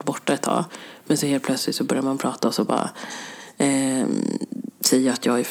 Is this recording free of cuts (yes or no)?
yes